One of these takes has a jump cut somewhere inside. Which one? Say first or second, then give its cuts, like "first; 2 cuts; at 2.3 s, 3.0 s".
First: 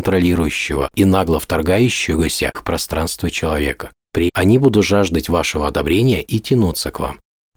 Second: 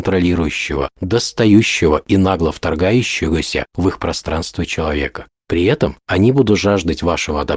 first; 3 cuts; at 0.9 s, 2.5 s, 4.3 s